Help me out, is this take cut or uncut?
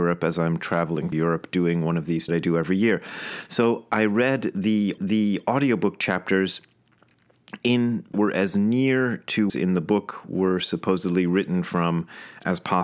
cut